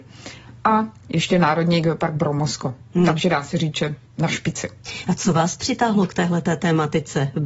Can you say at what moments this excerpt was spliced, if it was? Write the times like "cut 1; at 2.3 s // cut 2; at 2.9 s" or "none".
cut 1; at 4.0 s

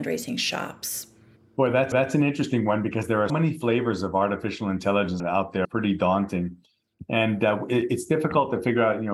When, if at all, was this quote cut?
cut 1; at 1.4 s // cut 2; at 1.9 s // cut 3; at 3.3 s // cut 4; at 5.6 s

